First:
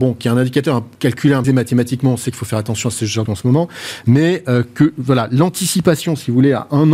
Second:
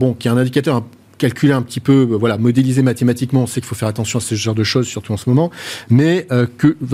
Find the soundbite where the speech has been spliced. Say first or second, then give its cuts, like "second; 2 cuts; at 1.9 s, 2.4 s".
first; 3 cuts; at 0.9 s, 1.4 s, 3.3 s